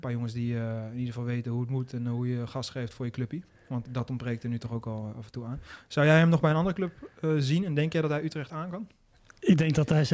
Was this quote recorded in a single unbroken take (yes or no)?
no